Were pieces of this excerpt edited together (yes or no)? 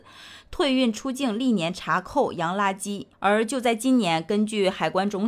yes